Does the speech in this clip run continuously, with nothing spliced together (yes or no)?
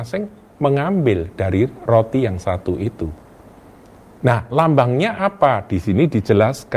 yes